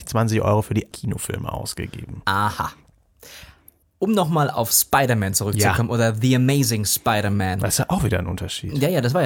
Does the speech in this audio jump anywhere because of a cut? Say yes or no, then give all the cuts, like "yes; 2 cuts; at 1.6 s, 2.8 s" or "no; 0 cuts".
yes; 2 cuts; at 0.9 s, 3.8 s